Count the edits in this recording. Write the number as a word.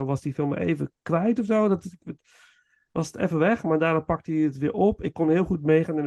zero